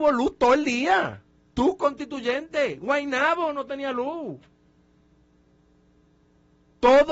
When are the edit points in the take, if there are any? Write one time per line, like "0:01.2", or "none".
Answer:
0:01.4